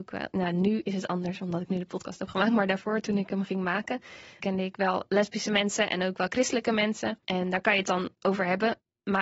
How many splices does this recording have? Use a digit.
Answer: 3